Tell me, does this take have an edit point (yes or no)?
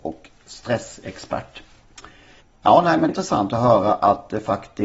yes